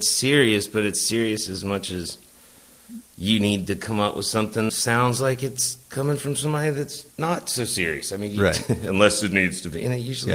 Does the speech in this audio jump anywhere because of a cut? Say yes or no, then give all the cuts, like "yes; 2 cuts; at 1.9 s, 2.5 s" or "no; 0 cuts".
yes; 4 cuts; at 3.1 s, 4.7 s, 5.8 s, 7.1 s